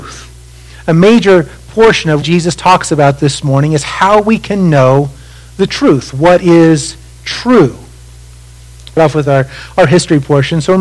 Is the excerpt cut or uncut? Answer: cut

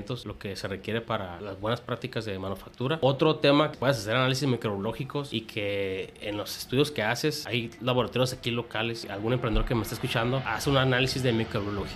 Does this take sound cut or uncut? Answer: cut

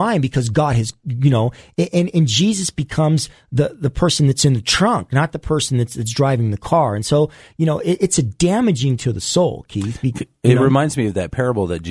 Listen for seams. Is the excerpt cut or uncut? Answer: uncut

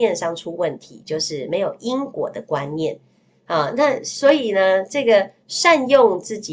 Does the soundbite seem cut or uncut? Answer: uncut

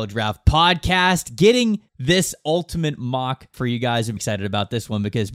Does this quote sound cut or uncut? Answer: cut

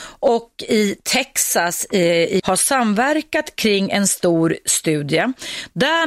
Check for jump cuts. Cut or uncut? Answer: cut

